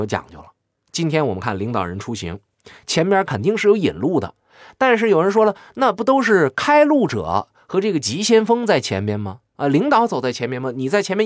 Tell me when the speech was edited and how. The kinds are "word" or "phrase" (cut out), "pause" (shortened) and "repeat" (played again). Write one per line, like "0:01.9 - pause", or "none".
none